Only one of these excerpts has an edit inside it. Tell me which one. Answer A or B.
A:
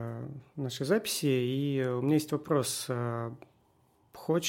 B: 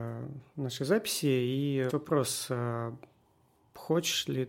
B